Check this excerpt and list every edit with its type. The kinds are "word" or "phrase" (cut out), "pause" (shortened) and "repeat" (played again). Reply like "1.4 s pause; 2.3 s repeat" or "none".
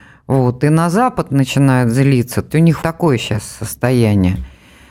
2.5 s word; 2.8 s word